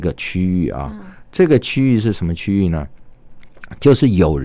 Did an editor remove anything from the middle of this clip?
no; 0 cuts

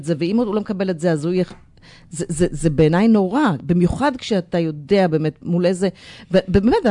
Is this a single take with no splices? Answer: yes; 0 cuts

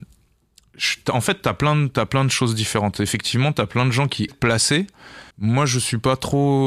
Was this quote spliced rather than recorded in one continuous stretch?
yes; 2 cuts; at 4.3 s, 5.3 s

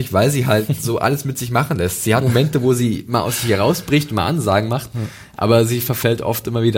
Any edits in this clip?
yes; 1 cut; at 2.2 s

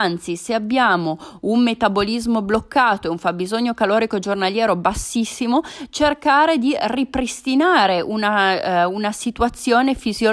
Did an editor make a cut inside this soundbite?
no; 0 cuts

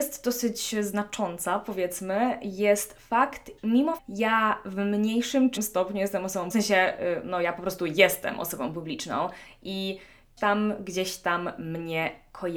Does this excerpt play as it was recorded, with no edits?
no; 5 cuts; at 3.6 s, 4.0 s, 5.6 s, 6.5 s, 10.4 s

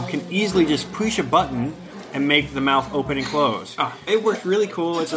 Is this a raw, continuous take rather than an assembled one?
no; 1 cut; at 4.1 s

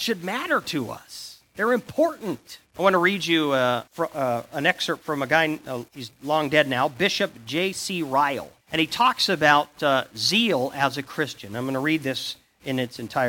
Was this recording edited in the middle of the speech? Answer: yes; 3 cuts; at 3.9 s, 5.9 s, 8.6 s

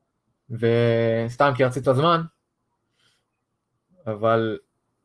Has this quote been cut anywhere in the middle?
yes; 1 cut; at 1.8 s

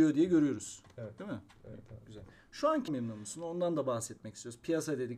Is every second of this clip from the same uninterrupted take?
no; 1 cut; at 2.9 s

